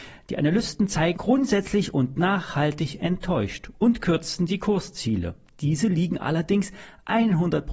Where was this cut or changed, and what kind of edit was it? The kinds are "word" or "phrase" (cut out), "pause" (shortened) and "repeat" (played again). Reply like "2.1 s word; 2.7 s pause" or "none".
1.2 s word